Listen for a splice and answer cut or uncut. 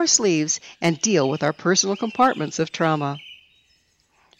uncut